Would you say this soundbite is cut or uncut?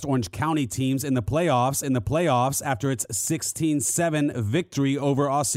cut